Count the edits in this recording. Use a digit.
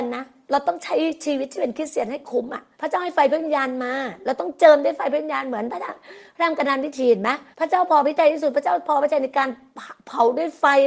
2